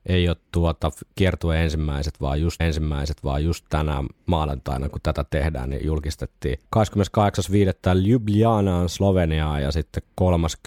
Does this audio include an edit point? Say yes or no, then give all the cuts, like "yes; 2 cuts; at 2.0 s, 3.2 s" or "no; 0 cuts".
yes; 2 cuts; at 2.6 s, 6.7 s